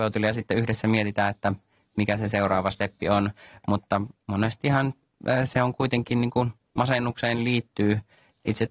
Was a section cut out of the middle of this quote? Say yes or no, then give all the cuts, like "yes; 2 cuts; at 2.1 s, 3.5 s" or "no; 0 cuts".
no; 0 cuts